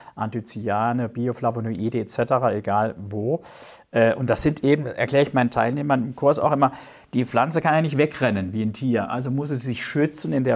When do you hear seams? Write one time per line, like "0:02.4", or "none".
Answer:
none